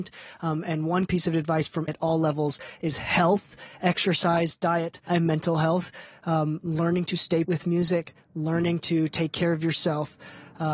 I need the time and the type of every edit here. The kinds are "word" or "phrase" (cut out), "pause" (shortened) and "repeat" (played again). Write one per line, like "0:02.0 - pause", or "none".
0:01.1 - word
0:01.9 - word
0:05.1 - word
0:07.4 - word